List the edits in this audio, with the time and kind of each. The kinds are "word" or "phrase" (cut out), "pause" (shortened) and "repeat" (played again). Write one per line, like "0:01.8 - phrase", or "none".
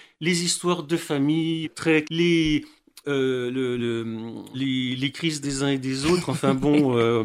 0:01.6 - word
0:02.0 - word
0:03.0 - word
0:03.8 - word
0:04.5 - word
0:05.4 - word